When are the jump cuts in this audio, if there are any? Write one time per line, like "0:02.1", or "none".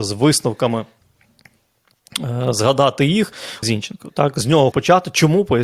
0:03.6
0:04.7